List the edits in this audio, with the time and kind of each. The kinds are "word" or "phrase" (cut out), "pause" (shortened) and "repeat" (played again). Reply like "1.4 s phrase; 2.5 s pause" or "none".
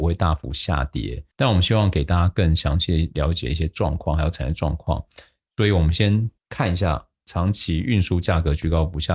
1.3 s pause; 6.4 s pause